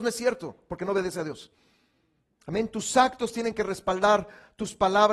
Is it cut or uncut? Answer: uncut